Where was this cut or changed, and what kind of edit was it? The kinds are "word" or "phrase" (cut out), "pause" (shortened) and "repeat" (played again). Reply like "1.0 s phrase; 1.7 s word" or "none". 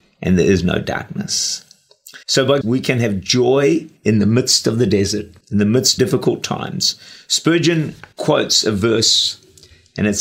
2.2 s pause; 2.6 s phrase; 4.0 s pause; 5.4 s pause; 6.0 s word; 8.1 s pause